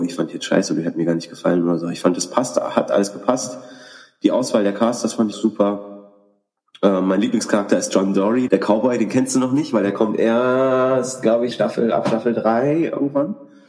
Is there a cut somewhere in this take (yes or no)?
yes